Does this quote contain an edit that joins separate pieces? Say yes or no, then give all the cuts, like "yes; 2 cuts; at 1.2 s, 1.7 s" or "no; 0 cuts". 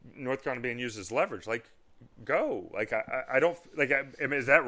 no; 0 cuts